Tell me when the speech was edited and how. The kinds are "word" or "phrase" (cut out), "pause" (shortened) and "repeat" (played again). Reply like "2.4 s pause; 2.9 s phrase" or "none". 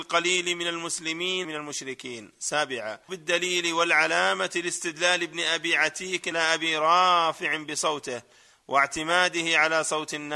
1.4 s word; 3.1 s word; 6.3 s word